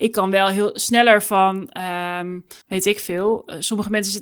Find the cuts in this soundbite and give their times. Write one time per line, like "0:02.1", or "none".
0:02.6